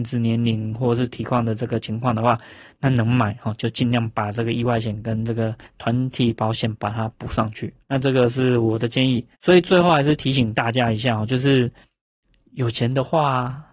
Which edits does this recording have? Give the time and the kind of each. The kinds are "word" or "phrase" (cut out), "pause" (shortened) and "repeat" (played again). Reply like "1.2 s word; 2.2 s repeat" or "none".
5.7 s pause; 7.8 s pause; 9.3 s pause